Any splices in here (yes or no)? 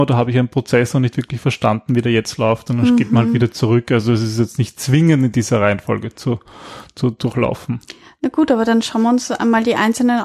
no